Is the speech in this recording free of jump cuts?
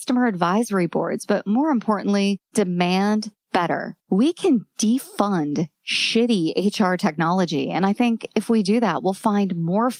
no; 1 cut; at 4.0 s

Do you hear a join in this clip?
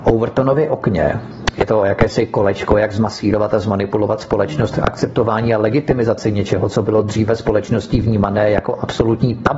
no; 0 cuts

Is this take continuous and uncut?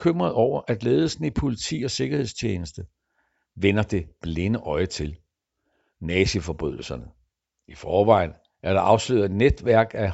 yes; 0 cuts

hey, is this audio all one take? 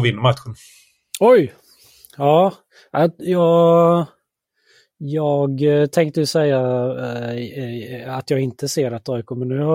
yes; 0 cuts

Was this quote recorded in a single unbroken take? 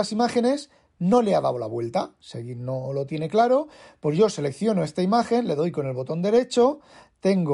yes; 0 cuts

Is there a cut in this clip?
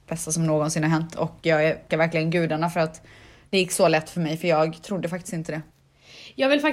yes; 1 cut; at 1.9 s

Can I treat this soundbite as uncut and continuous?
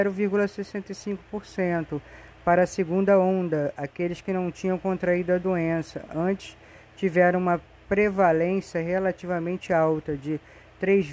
yes; 0 cuts

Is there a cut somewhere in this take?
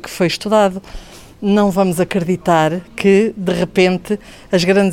no; 0 cuts

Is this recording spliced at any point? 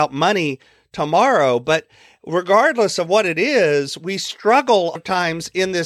yes; 1 cut; at 5.0 s

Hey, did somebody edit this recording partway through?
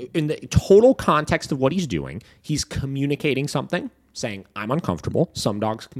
no; 0 cuts

